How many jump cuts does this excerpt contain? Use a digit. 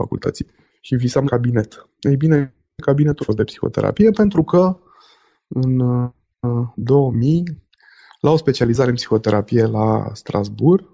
2